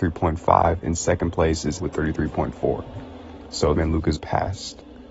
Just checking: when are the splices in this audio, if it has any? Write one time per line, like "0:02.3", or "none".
0:01.8
0:03.7
0:04.2